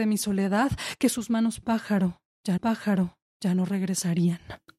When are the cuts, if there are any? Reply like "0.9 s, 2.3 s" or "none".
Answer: 2.6 s